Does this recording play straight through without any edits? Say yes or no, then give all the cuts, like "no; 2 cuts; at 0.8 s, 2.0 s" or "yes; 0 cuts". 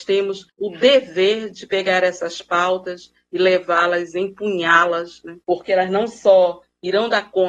no; 1 cut; at 5.4 s